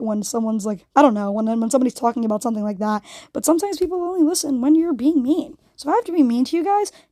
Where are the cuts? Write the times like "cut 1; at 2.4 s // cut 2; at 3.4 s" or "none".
cut 1; at 0.9 s